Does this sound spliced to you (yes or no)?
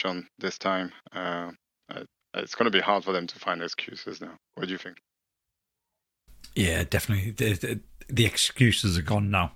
no